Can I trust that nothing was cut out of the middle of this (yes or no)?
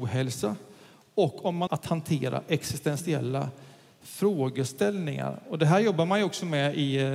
no